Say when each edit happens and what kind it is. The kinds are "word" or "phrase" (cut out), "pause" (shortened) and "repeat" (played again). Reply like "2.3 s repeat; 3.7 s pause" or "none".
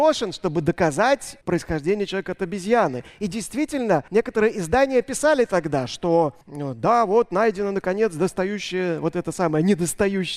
1.4 s pause; 4.1 s pause; 6.4 s pause